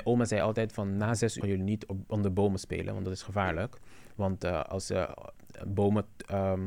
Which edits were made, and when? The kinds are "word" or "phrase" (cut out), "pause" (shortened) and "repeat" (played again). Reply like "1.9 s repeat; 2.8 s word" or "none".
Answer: 1.4 s word

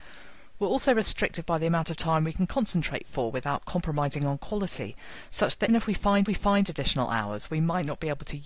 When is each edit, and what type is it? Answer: 5.7 s word; 6.3 s repeat

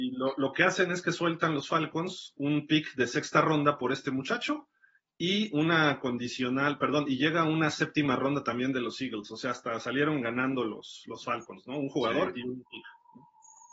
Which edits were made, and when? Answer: none

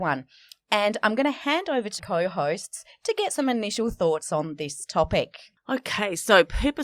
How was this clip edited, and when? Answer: 2.0 s word

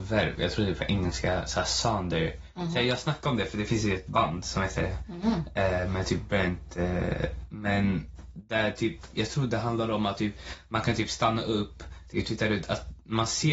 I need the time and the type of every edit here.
none

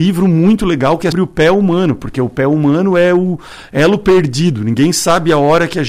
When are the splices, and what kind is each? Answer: 1.1 s word

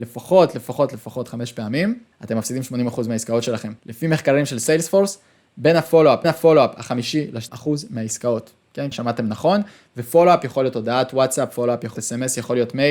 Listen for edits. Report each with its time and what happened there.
2.1 s pause; 3.8 s pause; 6.2 s repeat; 7.5 s word; 8.9 s word; 12.0 s word

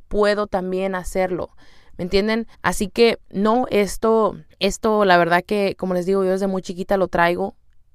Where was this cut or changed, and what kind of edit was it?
2.5 s pause; 3.2 s pause; 4.5 s pause

